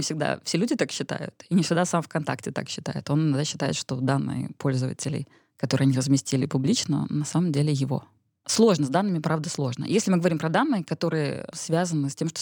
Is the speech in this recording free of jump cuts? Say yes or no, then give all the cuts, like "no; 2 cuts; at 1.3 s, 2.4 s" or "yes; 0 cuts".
yes; 0 cuts